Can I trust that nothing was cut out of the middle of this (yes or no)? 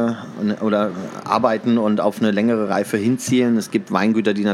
yes